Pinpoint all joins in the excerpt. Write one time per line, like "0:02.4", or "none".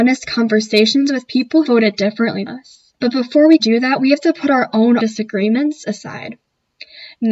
0:01.6
0:02.5
0:02.9
0:03.6
0:05.0